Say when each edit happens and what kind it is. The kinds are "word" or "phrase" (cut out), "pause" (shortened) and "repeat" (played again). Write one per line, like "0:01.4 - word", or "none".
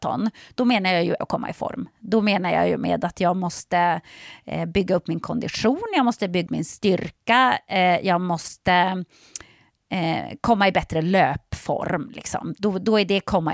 0:01.2 - phrase
0:06.5 - word